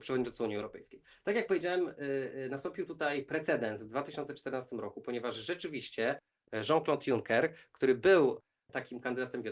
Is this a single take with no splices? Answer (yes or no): yes